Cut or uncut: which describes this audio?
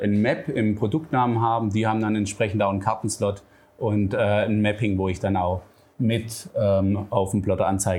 uncut